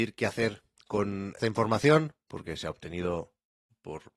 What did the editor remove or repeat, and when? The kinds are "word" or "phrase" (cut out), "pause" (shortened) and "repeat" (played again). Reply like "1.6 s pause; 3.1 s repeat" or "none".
1.4 s word